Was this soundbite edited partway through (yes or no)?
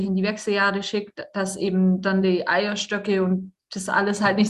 no